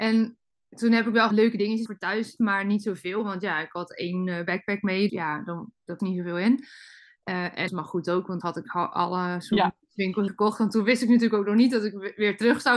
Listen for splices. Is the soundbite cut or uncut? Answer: cut